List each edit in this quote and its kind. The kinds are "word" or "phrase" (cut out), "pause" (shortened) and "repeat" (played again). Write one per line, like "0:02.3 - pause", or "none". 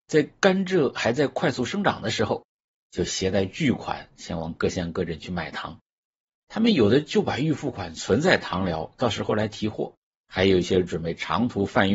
0:10.0 - pause